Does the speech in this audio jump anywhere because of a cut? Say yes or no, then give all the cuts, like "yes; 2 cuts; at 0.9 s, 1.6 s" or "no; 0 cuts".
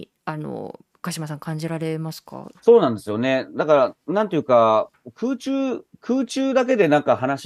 yes; 1 cut; at 2.6 s